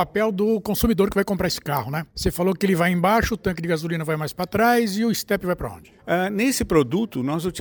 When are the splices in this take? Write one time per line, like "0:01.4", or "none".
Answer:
0:02.1
0:06.0